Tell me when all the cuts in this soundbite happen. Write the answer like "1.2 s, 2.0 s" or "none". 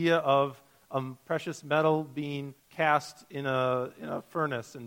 2.6 s